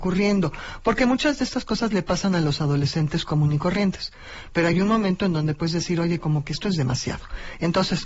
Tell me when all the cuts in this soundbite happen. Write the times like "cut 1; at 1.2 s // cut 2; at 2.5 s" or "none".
none